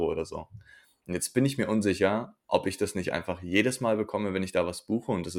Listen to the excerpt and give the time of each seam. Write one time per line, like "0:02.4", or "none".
none